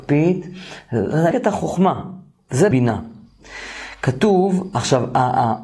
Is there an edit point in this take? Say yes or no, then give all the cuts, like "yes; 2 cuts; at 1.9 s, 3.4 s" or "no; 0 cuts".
yes; 2 cuts; at 1.3 s, 2.7 s